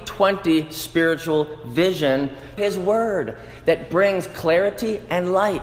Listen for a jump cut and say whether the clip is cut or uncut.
cut